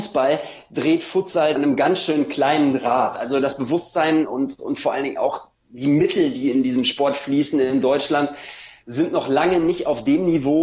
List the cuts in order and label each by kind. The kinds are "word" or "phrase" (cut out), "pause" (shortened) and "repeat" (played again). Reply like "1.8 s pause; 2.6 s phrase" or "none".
1.6 s phrase